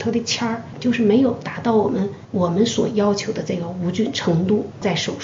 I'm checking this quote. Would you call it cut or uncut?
uncut